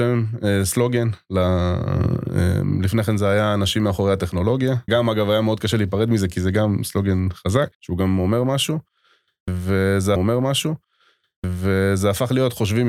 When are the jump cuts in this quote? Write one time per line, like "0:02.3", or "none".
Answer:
0:04.9
0:07.7
0:10.2